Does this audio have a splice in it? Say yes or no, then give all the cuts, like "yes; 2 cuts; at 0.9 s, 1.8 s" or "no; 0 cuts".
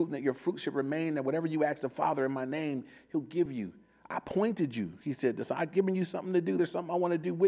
no; 0 cuts